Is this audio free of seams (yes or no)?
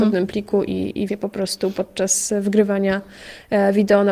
no